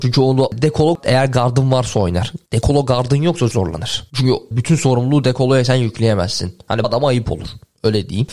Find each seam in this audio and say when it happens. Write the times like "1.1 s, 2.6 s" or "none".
2.5 s, 3.5 s, 4.5 s, 6.8 s